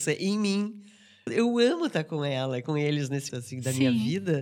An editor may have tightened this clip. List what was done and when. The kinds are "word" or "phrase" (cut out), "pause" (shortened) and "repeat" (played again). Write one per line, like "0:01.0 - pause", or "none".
0:01.3 - word
0:03.3 - word

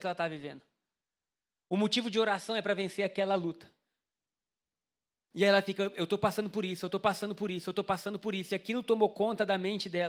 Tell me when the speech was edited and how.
none

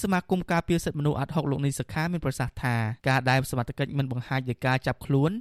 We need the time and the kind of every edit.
0:03.0 - pause

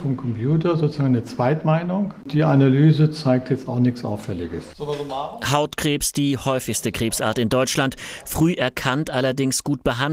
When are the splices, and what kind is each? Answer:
none

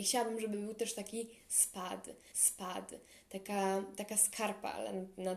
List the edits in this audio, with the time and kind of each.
0:02.3 - repeat

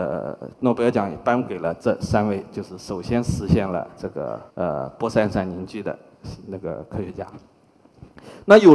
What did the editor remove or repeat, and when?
0:04.5 - pause

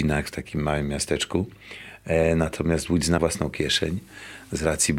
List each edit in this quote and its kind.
0:03.2 - word

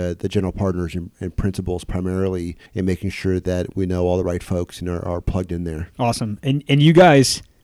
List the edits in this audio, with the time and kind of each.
0:02.7 - pause
0:05.9 - pause

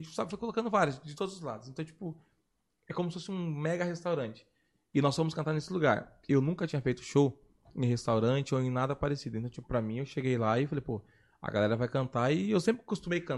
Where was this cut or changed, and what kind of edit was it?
none

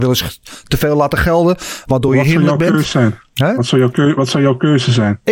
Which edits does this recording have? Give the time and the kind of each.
none

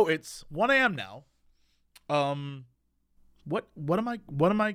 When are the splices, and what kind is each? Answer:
none

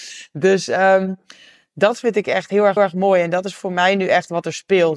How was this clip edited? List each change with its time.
0:02.8 - repeat

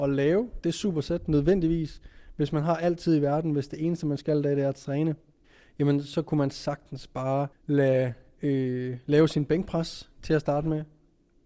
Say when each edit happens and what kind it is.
0:05.4 - pause
0:07.5 - pause

